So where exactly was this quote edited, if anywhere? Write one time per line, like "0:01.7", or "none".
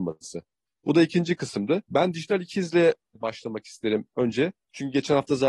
0:01.9

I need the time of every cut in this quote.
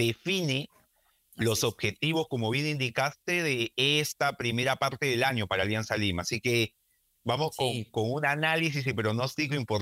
none

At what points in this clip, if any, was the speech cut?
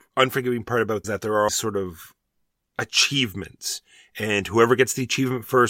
0:01.0
0:01.5

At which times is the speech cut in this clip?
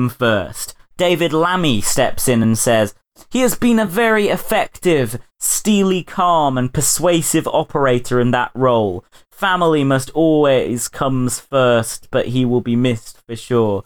none

